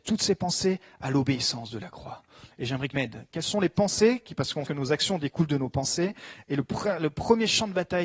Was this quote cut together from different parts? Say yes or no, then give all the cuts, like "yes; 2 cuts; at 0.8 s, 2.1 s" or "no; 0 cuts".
yes; 2 cuts; at 2.9 s, 4.7 s